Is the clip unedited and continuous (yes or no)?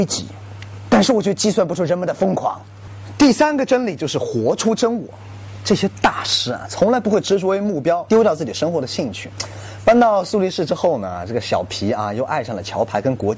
no